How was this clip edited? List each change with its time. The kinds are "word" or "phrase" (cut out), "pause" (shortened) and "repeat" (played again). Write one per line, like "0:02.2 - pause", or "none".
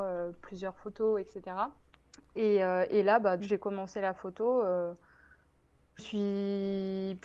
0:01.9 - pause
0:03.4 - word
0:06.0 - word